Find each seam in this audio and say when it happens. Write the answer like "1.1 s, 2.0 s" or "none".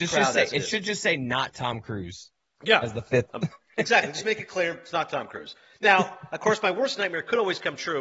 none